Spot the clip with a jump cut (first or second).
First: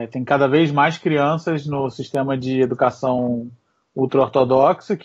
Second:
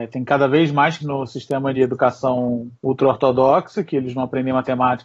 second